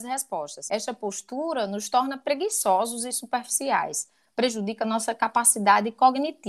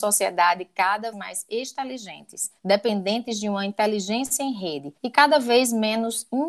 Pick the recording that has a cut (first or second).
second